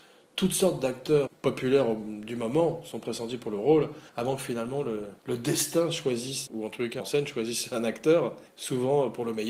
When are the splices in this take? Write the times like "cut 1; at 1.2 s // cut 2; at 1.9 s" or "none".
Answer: cut 1; at 1.3 s // cut 2; at 4.1 s // cut 3; at 5.2 s // cut 4; at 6.5 s // cut 5; at 7.0 s // cut 6; at 8.5 s